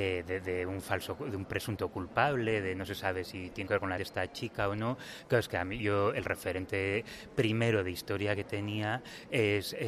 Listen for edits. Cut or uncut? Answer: cut